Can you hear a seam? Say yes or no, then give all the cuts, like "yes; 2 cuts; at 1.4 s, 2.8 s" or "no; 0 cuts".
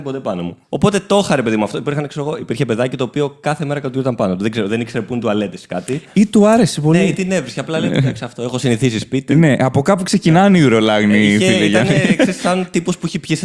no; 0 cuts